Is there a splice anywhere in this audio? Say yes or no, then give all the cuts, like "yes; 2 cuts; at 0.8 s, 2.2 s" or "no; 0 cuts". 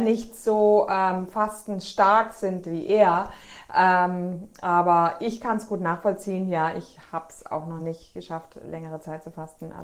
no; 0 cuts